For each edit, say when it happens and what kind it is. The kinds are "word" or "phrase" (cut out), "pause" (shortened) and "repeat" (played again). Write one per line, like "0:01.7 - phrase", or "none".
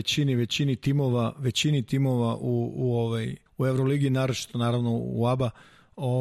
0:03.5 - pause